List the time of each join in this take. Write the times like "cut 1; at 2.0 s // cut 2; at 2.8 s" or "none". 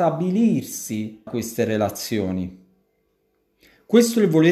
cut 1; at 1.3 s